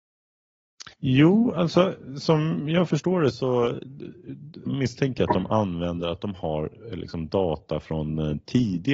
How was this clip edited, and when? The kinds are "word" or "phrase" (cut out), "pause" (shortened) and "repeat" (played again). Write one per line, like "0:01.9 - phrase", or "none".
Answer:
0:00.9 - pause
0:04.7 - word